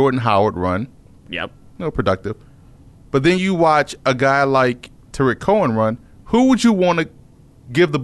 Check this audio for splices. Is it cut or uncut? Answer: uncut